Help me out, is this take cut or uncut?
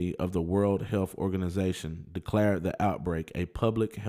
uncut